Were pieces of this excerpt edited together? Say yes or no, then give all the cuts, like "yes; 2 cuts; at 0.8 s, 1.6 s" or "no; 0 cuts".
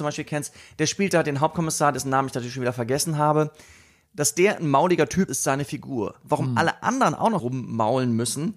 yes; 2 cuts; at 5.3 s, 7.4 s